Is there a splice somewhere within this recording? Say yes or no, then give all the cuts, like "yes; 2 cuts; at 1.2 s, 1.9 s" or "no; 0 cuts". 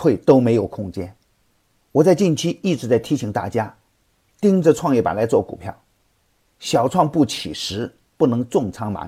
no; 0 cuts